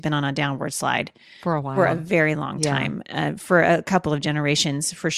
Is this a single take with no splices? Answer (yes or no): yes